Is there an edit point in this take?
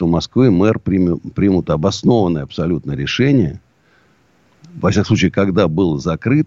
no; 0 cuts

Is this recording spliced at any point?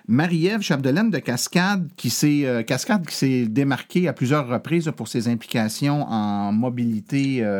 no; 0 cuts

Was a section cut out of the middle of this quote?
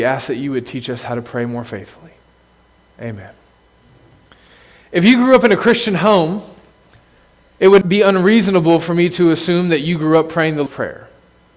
yes; 2 cuts; at 7.8 s, 10.7 s

